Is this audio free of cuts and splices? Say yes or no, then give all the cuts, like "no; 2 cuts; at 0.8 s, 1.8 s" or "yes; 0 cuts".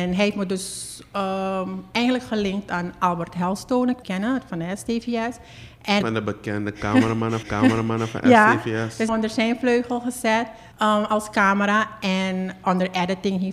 no; 6 cuts; at 4.0 s, 6.0 s, 7.4 s, 9.1 s, 10.7 s, 12.6 s